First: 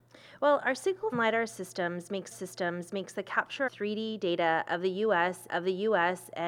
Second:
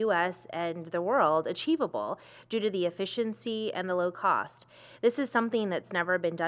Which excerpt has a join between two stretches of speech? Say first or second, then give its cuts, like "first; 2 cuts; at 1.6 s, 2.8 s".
first; 4 cuts; at 1.1 s, 2.3 s, 3.7 s, 5.5 s